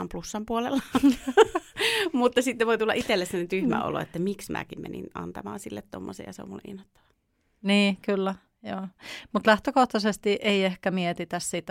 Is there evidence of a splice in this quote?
no; 0 cuts

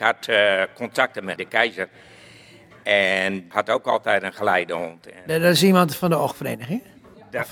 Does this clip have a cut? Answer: yes; 2 cuts; at 1.4 s, 3.5 s

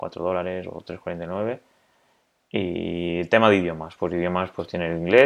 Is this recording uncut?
yes; 0 cuts

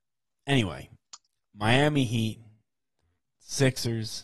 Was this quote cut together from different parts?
no; 0 cuts

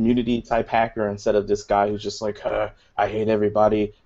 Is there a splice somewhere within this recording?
no; 0 cuts

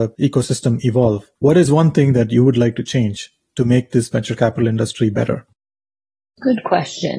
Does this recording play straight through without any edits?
yes; 0 cuts

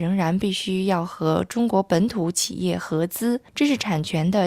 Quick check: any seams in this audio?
yes; 1 cut; at 3.5 s

